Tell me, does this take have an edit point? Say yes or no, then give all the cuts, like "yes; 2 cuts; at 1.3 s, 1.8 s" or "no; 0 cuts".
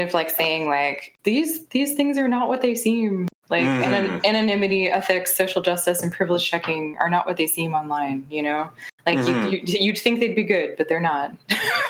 yes; 1 cut; at 3.4 s